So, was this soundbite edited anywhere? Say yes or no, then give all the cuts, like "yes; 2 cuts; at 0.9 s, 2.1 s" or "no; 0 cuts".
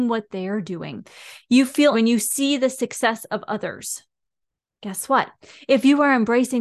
yes; 1 cut; at 1.9 s